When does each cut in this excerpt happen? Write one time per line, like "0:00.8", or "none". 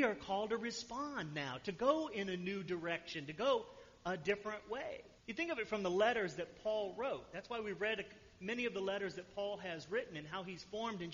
0:05.2